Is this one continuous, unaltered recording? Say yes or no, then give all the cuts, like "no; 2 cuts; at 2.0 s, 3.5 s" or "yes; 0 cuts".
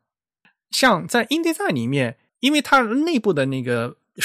yes; 0 cuts